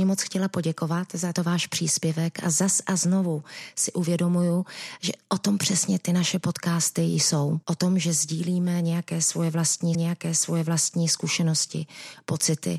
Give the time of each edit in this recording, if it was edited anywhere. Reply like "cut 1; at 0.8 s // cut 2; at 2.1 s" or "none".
cut 1; at 1.3 s // cut 2; at 7.6 s // cut 3; at 9.9 s